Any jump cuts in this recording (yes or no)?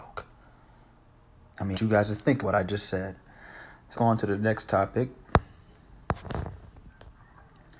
yes